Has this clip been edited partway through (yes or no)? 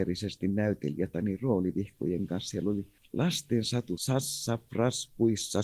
yes